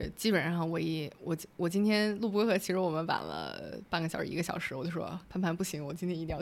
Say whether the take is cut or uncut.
cut